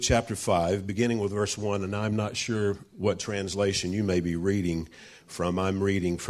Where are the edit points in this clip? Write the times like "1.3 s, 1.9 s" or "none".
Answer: none